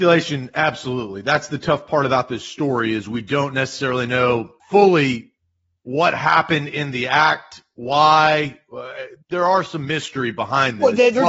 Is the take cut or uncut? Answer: cut